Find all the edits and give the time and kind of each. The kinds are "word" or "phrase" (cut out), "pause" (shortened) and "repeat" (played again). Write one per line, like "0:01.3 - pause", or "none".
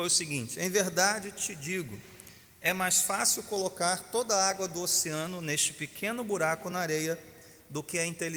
none